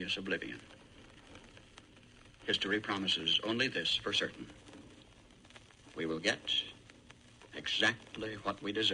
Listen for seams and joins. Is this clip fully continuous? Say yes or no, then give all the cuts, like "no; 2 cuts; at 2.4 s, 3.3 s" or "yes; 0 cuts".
yes; 0 cuts